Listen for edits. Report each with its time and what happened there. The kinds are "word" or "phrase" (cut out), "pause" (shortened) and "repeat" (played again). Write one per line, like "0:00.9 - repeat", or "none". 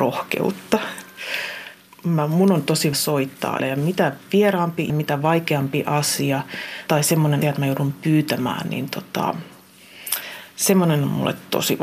0:02.9 - word
0:03.6 - word
0:04.9 - word
0:06.9 - word
0:07.4 - word